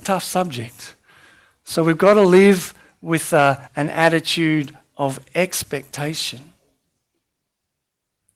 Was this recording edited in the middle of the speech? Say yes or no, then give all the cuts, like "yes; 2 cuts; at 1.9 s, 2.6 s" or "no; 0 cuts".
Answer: no; 0 cuts